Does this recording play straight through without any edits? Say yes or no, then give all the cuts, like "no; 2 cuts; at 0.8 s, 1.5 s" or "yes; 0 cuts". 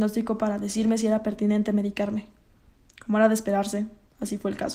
yes; 0 cuts